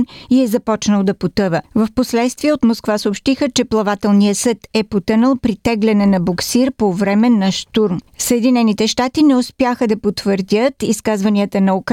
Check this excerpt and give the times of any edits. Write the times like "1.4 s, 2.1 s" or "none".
8.1 s